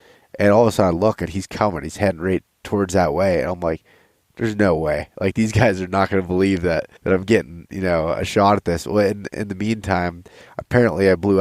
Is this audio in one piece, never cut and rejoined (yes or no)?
no